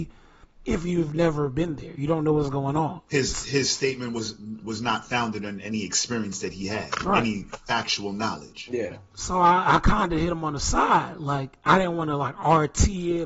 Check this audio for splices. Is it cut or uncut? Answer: cut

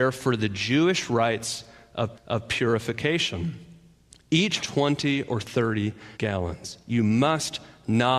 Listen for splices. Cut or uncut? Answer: cut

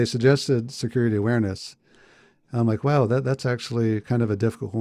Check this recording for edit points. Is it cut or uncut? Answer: uncut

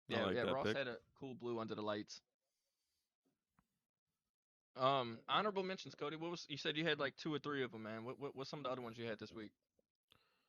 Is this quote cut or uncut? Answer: uncut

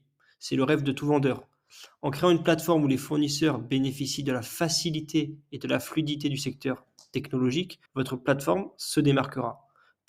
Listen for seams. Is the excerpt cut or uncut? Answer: cut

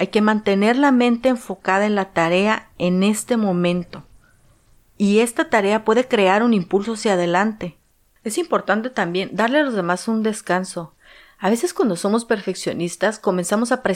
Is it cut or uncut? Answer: uncut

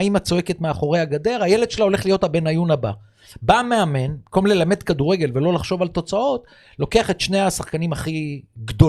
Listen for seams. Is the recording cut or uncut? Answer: uncut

